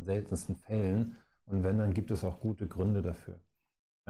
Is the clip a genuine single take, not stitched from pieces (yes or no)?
yes